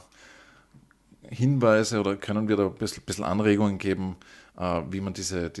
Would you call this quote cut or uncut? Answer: uncut